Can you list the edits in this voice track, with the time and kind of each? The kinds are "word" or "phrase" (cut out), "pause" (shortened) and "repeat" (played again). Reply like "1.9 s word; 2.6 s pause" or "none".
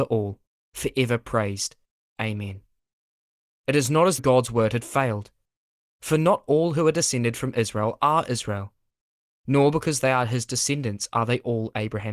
4.2 s word